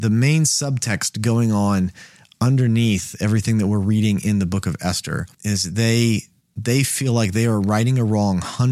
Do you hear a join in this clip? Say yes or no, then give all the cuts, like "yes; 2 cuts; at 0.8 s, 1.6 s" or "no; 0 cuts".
yes; 2 cuts; at 5.3 s, 6.4 s